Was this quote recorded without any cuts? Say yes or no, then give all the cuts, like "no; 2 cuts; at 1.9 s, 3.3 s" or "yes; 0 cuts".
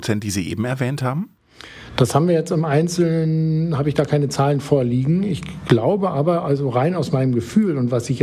yes; 0 cuts